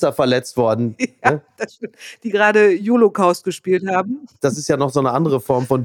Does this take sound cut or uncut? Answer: uncut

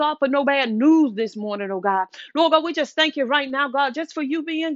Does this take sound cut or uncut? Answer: uncut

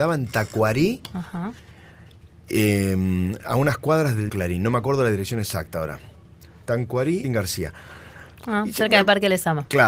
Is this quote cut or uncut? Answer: cut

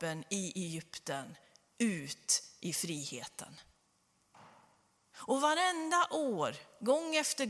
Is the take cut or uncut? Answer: uncut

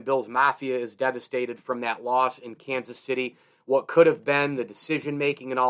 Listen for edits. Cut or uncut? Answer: uncut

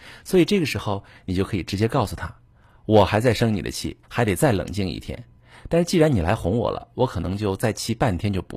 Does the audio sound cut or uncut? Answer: cut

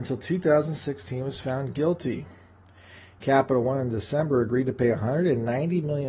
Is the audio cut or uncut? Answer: uncut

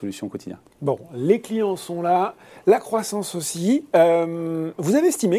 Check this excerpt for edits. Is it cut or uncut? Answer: uncut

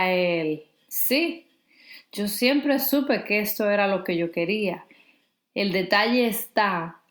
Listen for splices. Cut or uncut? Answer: uncut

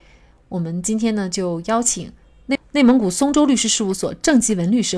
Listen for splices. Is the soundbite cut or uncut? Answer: uncut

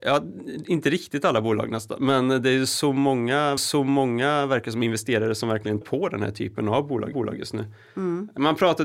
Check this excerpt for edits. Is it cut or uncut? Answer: cut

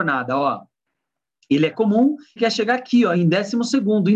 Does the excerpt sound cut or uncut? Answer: cut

